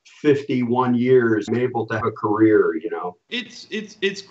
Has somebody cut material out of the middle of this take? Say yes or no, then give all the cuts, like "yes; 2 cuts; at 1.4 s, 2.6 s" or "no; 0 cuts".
yes; 3 cuts; at 1.5 s, 2.0 s, 3.2 s